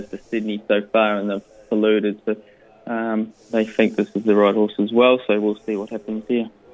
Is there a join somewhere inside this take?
no; 0 cuts

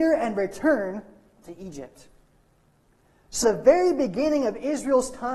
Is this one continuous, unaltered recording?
no; 1 cut; at 3.4 s

